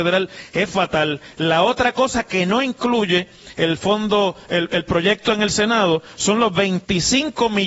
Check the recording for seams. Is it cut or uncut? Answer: uncut